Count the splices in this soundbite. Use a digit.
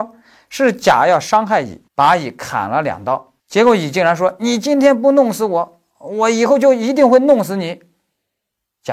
2